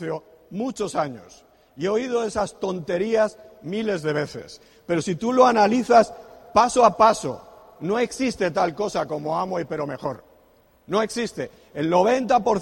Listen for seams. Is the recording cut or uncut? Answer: uncut